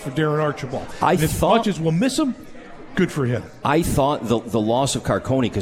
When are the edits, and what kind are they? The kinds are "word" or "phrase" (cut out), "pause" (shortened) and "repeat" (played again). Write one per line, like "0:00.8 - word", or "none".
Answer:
none